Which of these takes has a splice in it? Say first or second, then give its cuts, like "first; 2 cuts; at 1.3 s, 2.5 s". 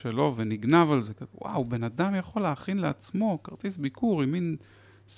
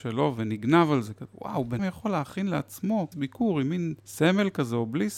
second; 3 cuts; at 1.8 s, 3.1 s, 4.0 s